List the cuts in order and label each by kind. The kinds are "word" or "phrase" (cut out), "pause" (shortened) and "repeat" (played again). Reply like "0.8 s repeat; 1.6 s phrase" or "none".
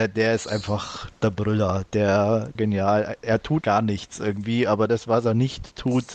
1.2 s pause; 2.5 s phrase; 3.6 s word